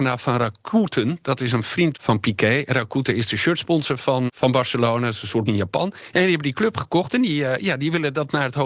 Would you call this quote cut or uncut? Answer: cut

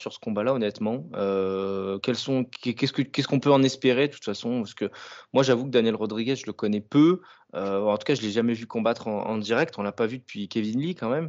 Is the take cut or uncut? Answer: uncut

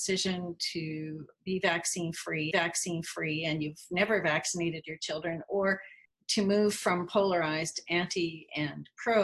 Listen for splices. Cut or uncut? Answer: cut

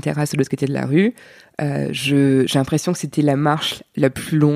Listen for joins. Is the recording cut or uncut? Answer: uncut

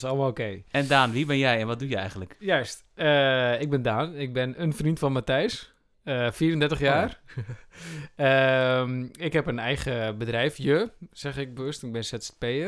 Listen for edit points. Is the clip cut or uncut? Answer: uncut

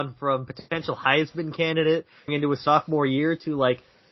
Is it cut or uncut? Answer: cut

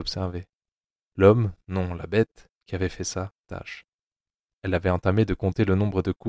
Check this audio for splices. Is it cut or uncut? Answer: cut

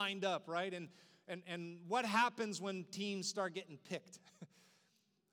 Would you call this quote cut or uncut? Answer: uncut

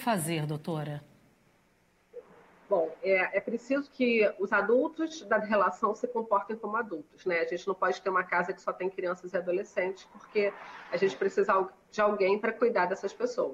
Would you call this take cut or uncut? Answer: uncut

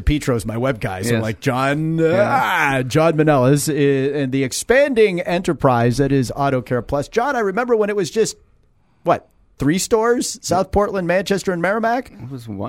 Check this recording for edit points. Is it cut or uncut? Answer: uncut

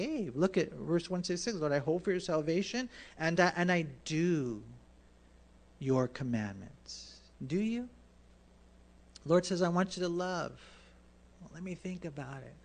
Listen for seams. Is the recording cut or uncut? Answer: uncut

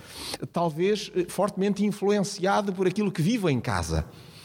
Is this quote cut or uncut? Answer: uncut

